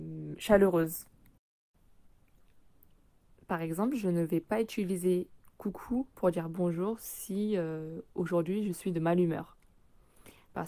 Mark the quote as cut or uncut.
uncut